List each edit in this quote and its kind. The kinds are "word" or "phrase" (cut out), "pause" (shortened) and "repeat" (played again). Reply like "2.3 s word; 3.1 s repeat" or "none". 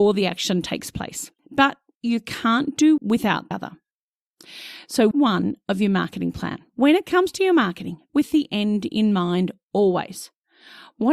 1.4 s pause; 3.0 s word; 3.5 s word; 5.1 s phrase; 6.7 s pause; 8.1 s word